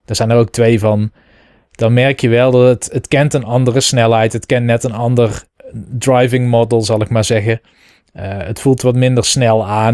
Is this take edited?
no; 0 cuts

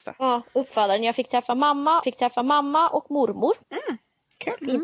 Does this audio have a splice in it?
yes; 2 cuts; at 2.0 s, 3.6 s

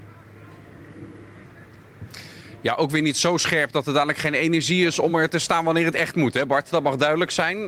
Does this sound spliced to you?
no; 0 cuts

